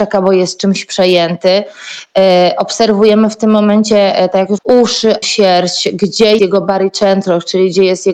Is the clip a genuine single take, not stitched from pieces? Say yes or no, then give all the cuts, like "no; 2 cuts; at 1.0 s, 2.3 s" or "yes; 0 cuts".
no; 3 cuts; at 4.6 s, 5.2 s, 6.4 s